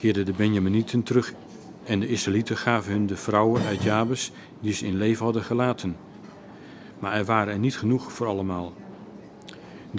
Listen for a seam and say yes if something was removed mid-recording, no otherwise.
no